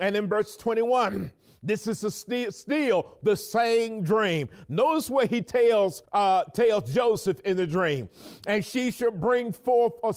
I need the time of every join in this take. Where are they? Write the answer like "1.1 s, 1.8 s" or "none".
6.0 s